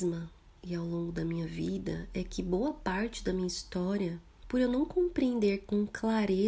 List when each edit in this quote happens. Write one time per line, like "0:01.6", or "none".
none